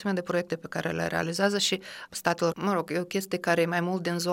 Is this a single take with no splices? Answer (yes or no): no